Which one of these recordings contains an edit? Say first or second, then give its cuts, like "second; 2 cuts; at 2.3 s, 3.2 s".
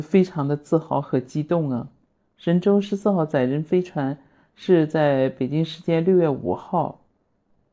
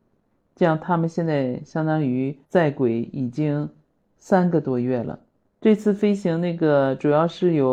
second; 1 cut; at 2.4 s